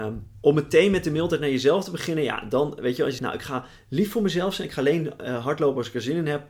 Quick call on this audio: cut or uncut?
cut